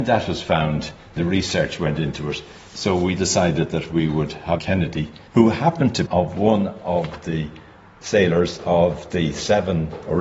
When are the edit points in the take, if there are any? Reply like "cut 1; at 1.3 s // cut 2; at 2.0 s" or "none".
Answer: cut 1; at 1.2 s // cut 2; at 3.2 s // cut 3; at 4.6 s // cut 4; at 5.3 s // cut 5; at 6.1 s